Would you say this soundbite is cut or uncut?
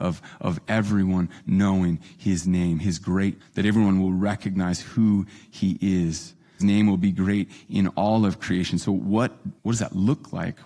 cut